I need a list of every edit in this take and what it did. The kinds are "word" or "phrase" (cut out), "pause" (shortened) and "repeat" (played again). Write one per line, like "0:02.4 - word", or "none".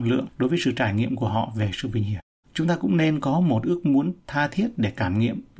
0:02.4 - pause